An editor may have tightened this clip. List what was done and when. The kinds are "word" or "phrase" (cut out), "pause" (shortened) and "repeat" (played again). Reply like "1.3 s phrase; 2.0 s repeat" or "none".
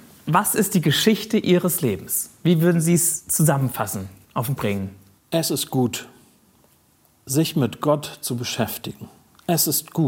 4.6 s word